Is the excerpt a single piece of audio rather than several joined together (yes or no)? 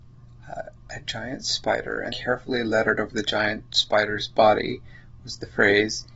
no